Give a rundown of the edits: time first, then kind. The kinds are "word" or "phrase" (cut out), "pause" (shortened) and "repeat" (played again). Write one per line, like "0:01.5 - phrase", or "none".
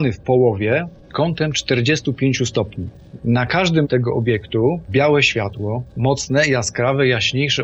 0:01.1 - word
0:03.8 - word
0:04.9 - word